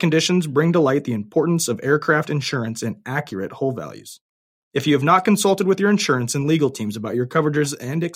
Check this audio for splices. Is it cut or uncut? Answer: uncut